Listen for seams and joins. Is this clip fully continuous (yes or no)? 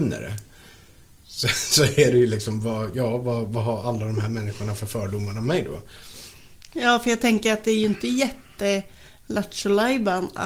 yes